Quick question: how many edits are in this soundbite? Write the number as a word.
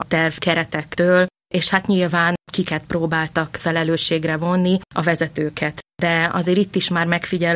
zero